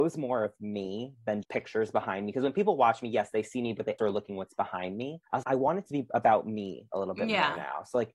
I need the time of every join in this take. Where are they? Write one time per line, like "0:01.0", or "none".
0:01.4
0:04.0
0:05.4